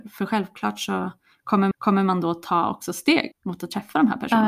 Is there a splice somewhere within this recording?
yes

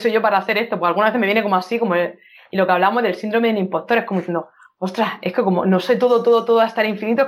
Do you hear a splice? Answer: no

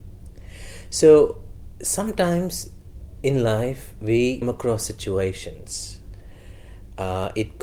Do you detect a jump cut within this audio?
yes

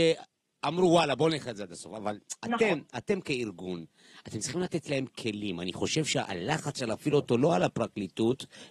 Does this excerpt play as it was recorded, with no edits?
yes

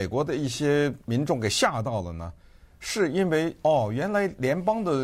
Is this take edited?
yes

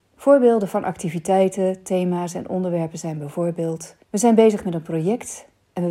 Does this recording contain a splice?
yes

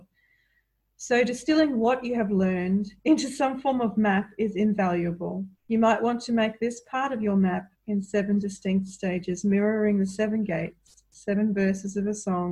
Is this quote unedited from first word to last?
no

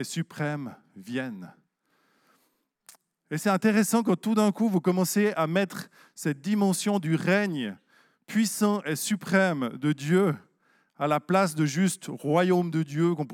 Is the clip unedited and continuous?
yes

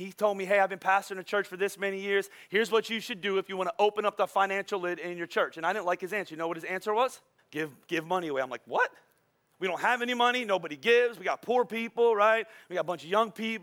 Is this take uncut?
no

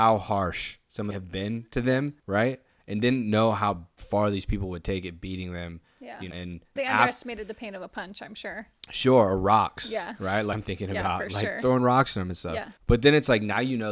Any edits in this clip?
yes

